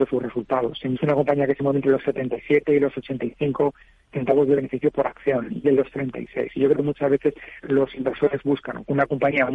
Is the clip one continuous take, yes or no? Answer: no